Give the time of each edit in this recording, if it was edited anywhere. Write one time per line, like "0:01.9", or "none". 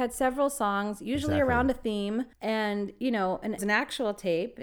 0:02.3
0:03.6